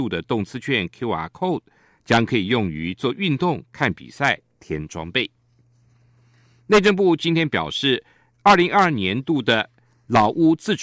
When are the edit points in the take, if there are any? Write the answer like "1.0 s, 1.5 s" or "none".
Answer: none